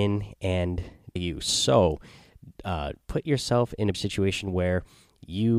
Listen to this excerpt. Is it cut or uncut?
cut